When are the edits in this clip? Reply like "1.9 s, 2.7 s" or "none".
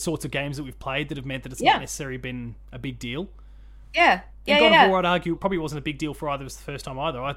5.4 s